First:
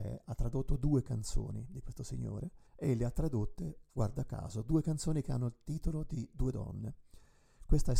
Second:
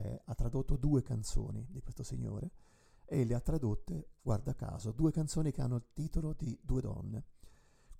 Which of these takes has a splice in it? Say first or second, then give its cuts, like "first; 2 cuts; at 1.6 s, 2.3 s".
first; 1 cut; at 2.7 s